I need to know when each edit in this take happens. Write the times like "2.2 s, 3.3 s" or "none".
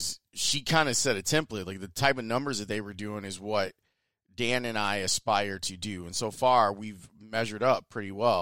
none